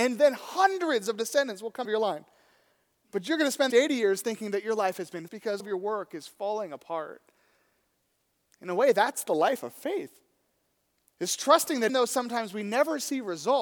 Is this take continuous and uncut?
no; 5 cuts; at 1.8 s, 3.7 s, 5.3 s, 5.6 s, 11.9 s

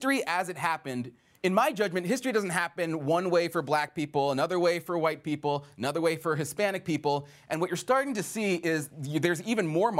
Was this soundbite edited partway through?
no; 0 cuts

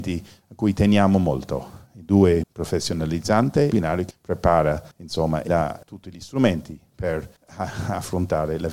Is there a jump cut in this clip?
yes; 7 cuts; at 2.4 s, 3.7 s, 4.1 s, 4.9 s, 5.5 s, 5.8 s, 7.4 s

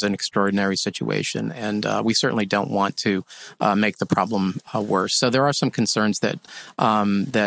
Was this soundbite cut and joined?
no; 0 cuts

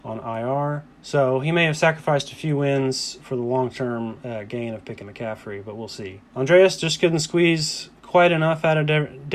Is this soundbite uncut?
no; 3 cuts; at 0.9 s, 5.0 s, 6.3 s

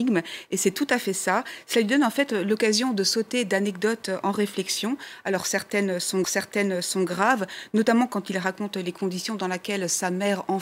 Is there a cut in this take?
yes; 1 cut; at 6.2 s

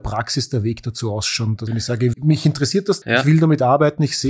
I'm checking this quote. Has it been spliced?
yes; 3 cuts; at 1.7 s, 2.1 s, 3.0 s

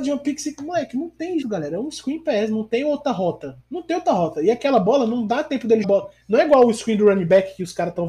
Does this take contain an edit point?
yes; 3 cuts; at 1.4 s, 3.6 s, 5.8 s

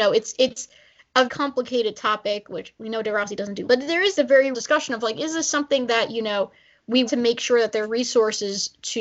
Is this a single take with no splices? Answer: no; 6 cuts; at 1.3 s, 3.6 s, 4.1 s, 4.5 s, 7.1 s, 7.8 s

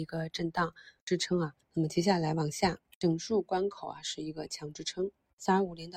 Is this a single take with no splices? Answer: no; 1 cut; at 1.6 s

